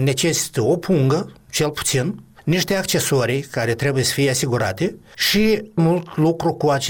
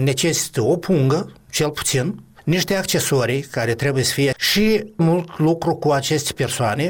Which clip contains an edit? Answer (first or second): second